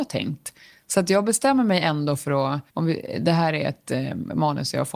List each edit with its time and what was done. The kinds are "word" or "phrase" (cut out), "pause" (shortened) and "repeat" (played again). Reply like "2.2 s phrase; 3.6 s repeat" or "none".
2.7 s pause